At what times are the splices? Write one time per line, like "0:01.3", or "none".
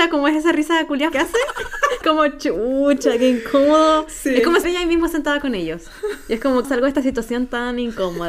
0:01.1
0:02.0
0:04.6
0:06.6